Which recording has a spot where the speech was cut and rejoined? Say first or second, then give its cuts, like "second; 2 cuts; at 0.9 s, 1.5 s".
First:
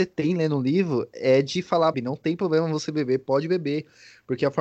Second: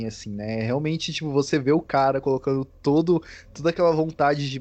first; 1 cut; at 1.9 s